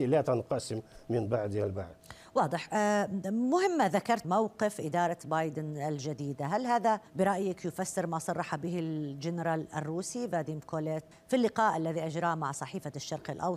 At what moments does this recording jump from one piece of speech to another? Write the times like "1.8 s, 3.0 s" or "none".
4.2 s, 7.1 s, 11.1 s